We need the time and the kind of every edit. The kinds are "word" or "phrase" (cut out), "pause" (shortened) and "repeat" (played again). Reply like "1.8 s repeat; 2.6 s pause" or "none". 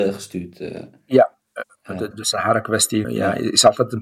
2.1 s word; 3.0 s word